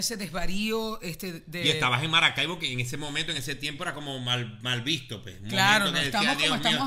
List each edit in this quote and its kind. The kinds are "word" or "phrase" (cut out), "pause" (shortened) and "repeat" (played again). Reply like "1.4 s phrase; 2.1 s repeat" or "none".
none